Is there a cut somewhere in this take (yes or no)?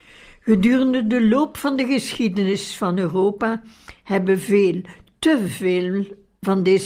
no